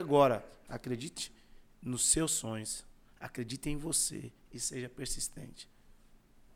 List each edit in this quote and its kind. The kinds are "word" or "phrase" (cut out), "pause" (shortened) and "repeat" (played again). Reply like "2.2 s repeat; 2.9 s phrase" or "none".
none